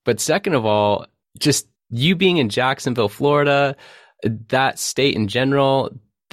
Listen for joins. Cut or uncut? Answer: uncut